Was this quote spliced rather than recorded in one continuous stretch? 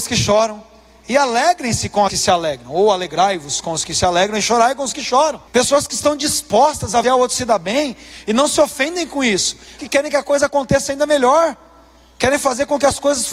yes; 4 cuts; at 2.1 s, 5.5 s, 7.0 s, 9.8 s

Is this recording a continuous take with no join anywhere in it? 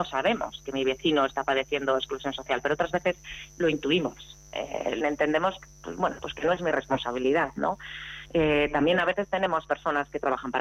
no; 1 cut; at 5.0 s

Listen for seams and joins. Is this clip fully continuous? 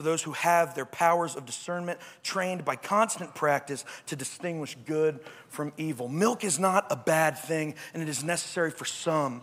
yes; 0 cuts

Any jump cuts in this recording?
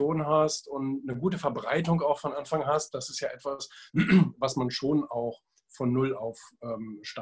no; 0 cuts

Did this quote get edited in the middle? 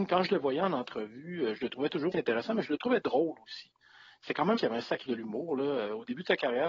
yes; 3 cuts; at 2.1 s, 4.6 s, 5.1 s

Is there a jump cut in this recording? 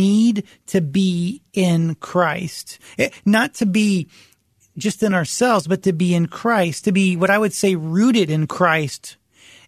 no; 0 cuts

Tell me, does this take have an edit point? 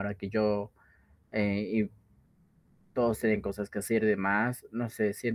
no; 0 cuts

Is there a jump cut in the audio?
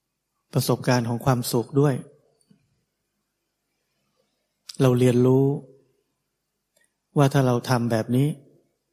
no; 0 cuts

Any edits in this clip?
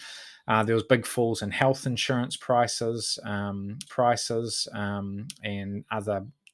yes; 1 cut; at 3.9 s

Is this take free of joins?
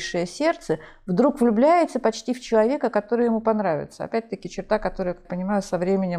no; 1 cut; at 5.2 s

